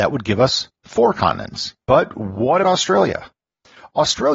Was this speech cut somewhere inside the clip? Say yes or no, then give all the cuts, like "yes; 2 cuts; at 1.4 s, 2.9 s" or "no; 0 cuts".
yes; 2 cuts; at 1.8 s, 2.6 s